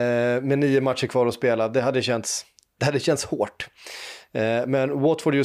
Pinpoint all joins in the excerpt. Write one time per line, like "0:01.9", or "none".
none